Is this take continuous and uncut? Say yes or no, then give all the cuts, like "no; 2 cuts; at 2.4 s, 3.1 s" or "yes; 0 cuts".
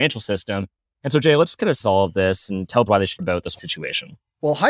no; 4 cuts; at 1.8 s, 2.9 s, 3.2 s, 3.6 s